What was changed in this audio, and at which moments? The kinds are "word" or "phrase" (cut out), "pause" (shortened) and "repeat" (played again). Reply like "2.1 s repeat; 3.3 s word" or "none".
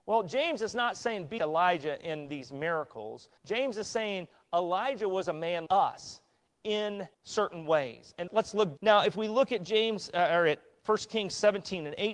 1.4 s word; 3.4 s pause; 5.7 s word; 7.1 s pause; 8.3 s word; 8.8 s phrase